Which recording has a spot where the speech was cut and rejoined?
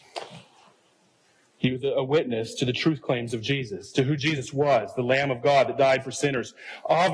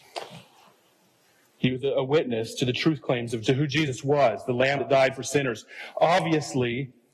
second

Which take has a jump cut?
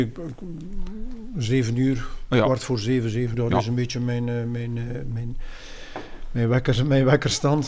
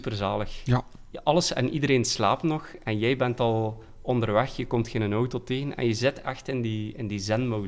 first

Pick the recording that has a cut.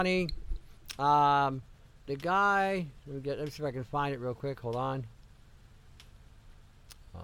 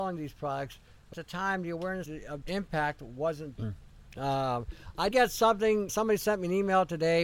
second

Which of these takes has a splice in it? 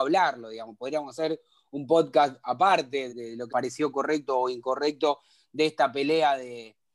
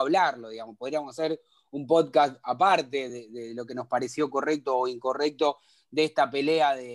first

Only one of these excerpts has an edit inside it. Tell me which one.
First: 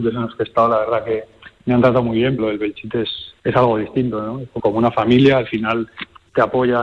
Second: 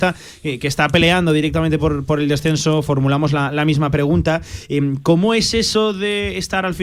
first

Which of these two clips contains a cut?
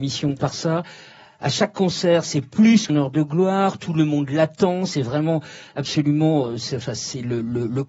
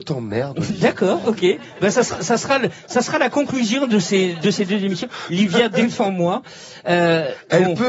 first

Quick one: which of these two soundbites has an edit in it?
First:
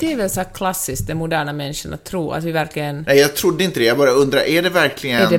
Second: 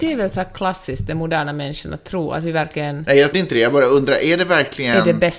second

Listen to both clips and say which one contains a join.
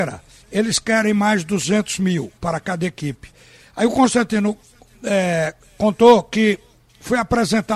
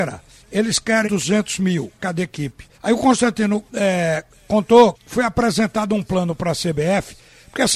second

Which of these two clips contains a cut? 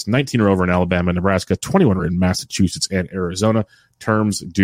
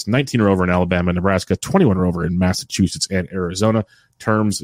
first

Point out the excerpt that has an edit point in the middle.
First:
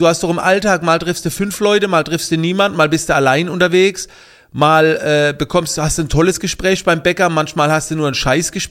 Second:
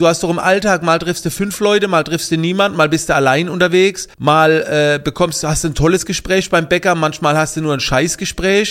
second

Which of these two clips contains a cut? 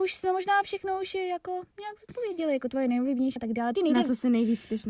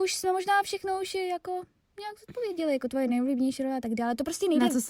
first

